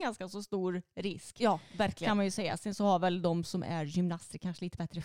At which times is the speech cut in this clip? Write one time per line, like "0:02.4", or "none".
none